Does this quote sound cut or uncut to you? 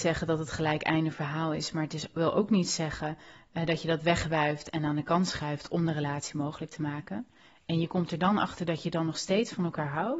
uncut